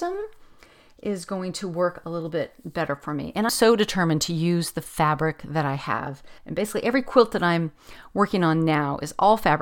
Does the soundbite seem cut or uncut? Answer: cut